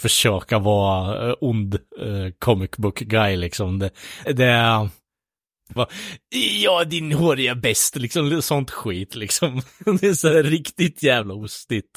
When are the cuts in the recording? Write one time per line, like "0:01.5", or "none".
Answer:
0:04.2
0:05.8